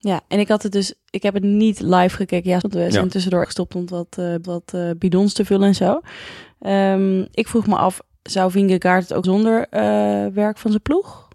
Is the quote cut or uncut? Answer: cut